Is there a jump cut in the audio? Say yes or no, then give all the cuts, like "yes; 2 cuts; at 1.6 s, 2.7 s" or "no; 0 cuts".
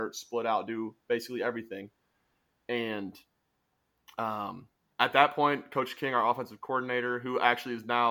no; 0 cuts